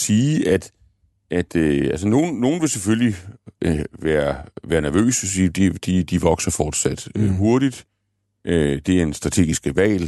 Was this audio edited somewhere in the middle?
no; 0 cuts

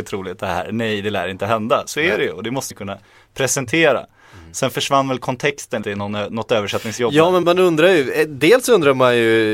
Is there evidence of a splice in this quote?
yes; 3 cuts; at 2.7 s, 5.8 s, 7.4 s

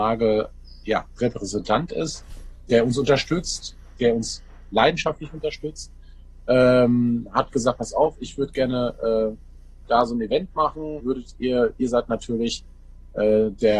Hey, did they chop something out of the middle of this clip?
yes; 2 cuts; at 2.7 s, 11.0 s

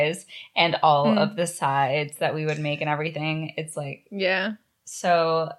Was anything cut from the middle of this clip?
no; 0 cuts

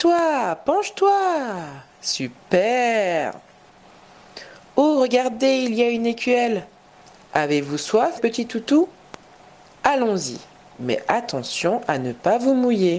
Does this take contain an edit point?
yes; 1 cut; at 8.2 s

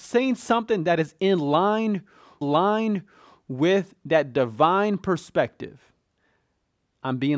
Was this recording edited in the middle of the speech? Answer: yes; 1 cut; at 2.4 s

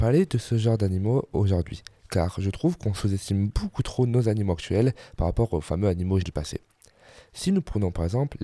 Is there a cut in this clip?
yes; 1 cut; at 6.2 s

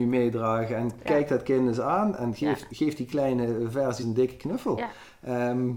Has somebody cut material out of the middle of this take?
yes; 1 cut; at 4.0 s

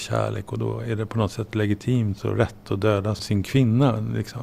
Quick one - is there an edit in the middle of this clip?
no; 0 cuts

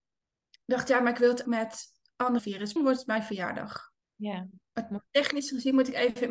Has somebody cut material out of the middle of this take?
yes; 5 cuts; at 1.4 s, 2.4 s, 2.8 s, 4.0 s, 5.1 s

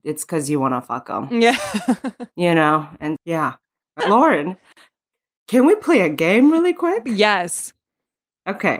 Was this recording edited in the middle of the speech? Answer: yes; 2 cuts; at 3.2 s, 4.0 s

